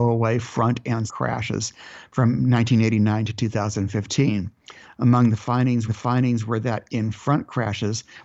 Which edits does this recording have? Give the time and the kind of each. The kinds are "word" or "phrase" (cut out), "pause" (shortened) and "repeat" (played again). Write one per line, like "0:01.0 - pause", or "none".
0:01.1 - word
0:05.9 - repeat